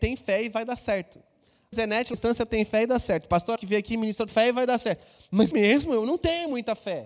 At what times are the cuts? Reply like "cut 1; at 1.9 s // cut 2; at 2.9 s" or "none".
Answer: cut 1; at 1.7 s // cut 2; at 2.1 s // cut 3; at 3.6 s // cut 4; at 4.3 s // cut 5; at 5.5 s